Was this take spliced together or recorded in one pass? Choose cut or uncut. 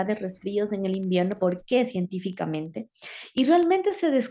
cut